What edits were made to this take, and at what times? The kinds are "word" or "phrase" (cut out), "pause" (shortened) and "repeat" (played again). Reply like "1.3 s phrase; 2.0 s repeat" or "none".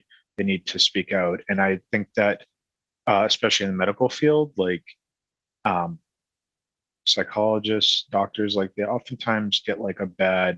none